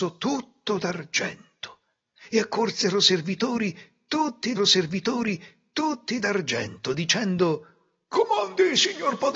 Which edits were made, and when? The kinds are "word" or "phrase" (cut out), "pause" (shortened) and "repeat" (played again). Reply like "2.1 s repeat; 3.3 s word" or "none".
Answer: 4.6 s repeat